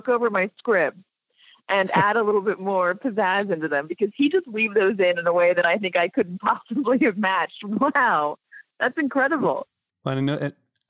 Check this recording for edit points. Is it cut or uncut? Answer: uncut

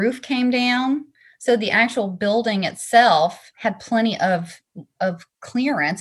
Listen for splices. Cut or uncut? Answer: uncut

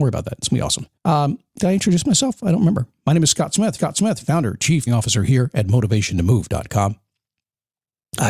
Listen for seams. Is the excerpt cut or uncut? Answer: cut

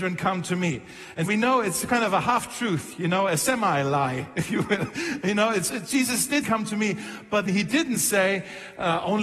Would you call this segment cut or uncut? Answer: cut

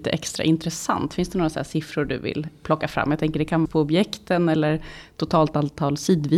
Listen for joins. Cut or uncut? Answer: cut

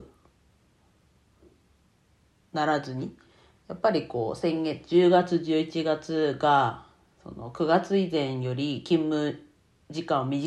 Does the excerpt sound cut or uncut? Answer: uncut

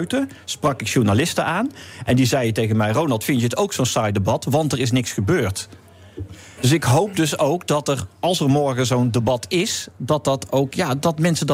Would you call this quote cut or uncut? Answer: uncut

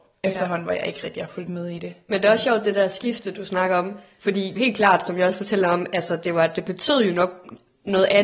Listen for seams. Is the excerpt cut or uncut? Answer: cut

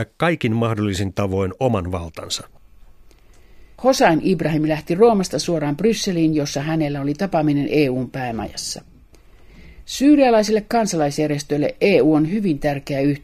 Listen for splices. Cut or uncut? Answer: cut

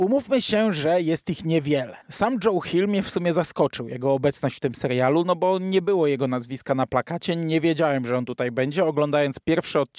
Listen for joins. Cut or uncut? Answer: cut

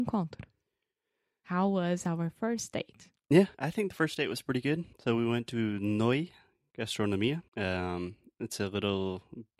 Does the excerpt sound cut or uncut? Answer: cut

